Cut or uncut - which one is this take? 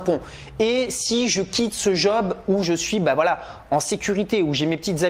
uncut